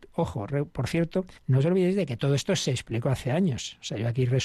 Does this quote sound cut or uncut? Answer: cut